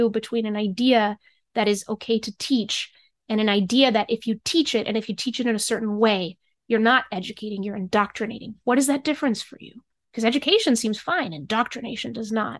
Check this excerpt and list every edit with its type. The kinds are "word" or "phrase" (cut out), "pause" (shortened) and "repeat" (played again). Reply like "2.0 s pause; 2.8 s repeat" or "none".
none